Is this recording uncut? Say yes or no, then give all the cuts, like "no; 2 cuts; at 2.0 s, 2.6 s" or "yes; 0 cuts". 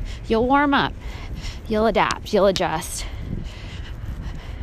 yes; 0 cuts